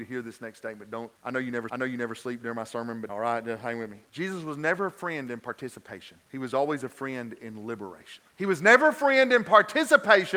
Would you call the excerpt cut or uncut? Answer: cut